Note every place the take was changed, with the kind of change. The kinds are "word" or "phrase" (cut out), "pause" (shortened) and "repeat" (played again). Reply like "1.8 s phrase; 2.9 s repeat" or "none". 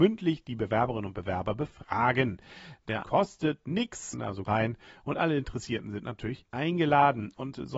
3.0 s word; 4.1 s phrase; 4.4 s word; 6.4 s word

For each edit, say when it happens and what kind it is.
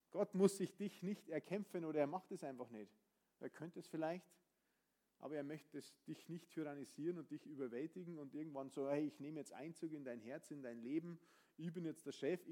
none

